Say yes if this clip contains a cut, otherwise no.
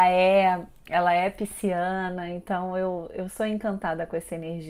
no